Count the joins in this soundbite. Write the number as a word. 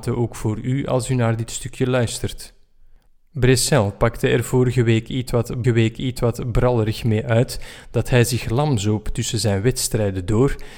one